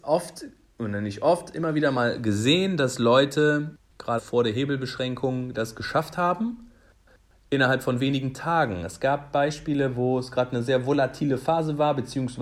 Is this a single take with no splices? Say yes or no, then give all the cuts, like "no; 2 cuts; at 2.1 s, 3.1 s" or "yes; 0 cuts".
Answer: no; 1 cut; at 4.2 s